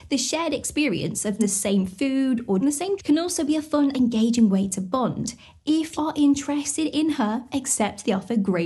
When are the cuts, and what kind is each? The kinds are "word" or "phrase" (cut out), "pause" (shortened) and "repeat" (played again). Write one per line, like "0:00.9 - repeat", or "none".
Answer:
0:01.4 - word
0:02.6 - word
0:03.0 - word
0:03.9 - word
0:06.0 - word